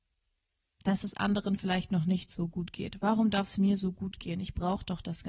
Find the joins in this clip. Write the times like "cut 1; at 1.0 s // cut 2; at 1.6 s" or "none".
none